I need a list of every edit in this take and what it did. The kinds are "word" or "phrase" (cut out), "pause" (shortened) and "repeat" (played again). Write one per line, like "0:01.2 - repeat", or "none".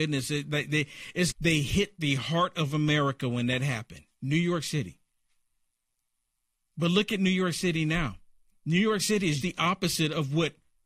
0:01.3 - word
0:04.1 - pause
0:09.4 - word